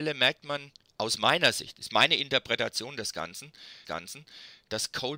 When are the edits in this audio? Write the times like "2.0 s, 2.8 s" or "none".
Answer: 3.8 s